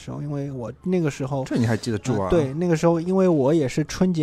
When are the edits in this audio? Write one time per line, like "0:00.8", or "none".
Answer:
none